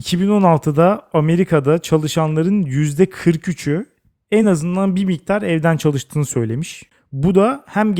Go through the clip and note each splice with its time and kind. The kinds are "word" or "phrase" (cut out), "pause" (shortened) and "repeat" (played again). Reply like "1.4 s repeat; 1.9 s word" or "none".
none